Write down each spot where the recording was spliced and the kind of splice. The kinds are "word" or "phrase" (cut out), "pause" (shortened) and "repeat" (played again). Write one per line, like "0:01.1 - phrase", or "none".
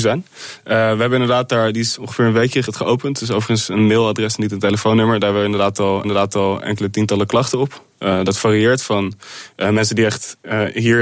0:02.7 - phrase
0:06.0 - repeat